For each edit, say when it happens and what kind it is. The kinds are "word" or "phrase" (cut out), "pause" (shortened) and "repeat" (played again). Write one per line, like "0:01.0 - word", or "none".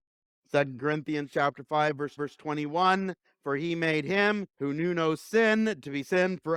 0:02.2 - repeat
0:04.5 - pause

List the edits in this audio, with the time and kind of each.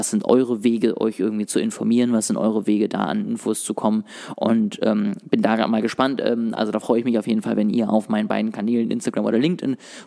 none

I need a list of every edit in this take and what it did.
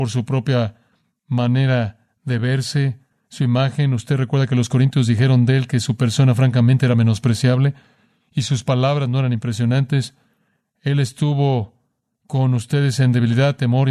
none

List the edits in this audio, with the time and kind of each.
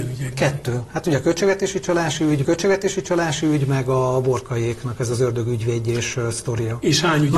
0:02.4 - repeat

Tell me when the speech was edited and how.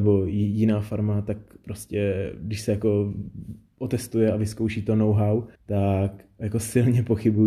0:05.5 - pause

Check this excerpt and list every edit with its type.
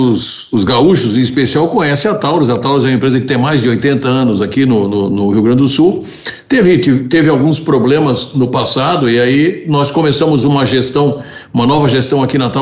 none

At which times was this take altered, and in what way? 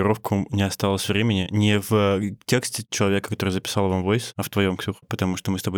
none

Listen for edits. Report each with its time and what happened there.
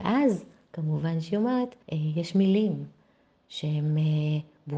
0:01.8 - pause

